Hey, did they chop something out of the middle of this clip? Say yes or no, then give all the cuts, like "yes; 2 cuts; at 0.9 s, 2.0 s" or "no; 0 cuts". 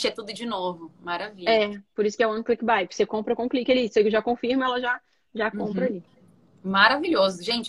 no; 0 cuts